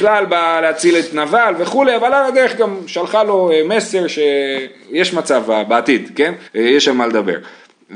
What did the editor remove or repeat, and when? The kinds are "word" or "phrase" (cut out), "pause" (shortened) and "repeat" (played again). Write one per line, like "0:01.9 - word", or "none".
0:06.5 - pause